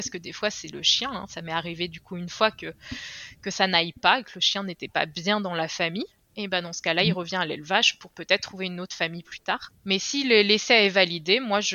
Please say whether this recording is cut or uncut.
uncut